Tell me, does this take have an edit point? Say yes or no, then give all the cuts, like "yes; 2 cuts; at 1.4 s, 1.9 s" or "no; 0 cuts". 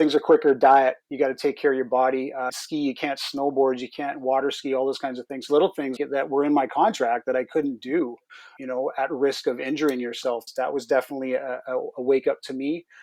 yes; 3 cuts; at 2.5 s, 5.5 s, 6.0 s